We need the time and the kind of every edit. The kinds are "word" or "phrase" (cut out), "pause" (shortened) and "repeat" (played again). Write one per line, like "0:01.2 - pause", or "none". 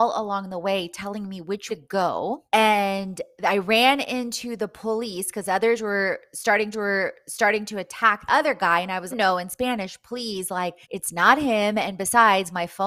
0:01.7 - word
0:02.5 - pause
0:06.7 - repeat
0:08.3 - word
0:09.1 - phrase
0:10.8 - pause